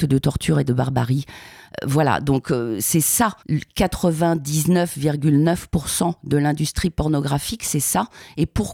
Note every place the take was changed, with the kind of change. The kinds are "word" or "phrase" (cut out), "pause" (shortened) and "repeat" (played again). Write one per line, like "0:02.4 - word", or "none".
0:03.4 - pause